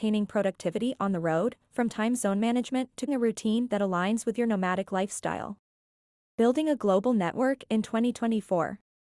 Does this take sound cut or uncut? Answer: cut